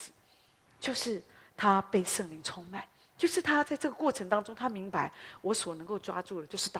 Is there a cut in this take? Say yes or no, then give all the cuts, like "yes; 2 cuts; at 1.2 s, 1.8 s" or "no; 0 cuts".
no; 0 cuts